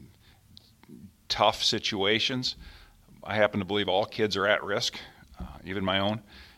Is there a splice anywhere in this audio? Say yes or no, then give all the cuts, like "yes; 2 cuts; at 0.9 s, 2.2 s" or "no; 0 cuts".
no; 0 cuts